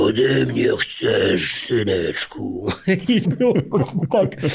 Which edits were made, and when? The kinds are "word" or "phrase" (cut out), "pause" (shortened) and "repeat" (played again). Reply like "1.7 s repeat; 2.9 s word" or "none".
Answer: 3.2 s word